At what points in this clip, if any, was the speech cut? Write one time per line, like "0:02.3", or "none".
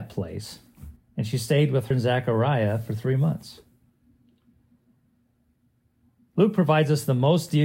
0:01.0
0:01.9